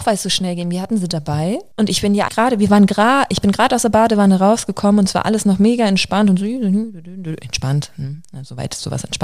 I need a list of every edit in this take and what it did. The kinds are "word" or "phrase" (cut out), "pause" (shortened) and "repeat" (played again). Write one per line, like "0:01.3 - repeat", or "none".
0:01.7 - pause
0:02.3 - word